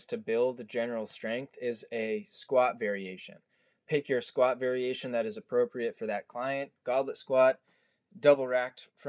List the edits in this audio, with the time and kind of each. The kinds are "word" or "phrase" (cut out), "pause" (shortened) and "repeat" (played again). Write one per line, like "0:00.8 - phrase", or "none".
none